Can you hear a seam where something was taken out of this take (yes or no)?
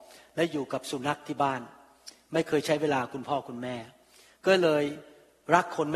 no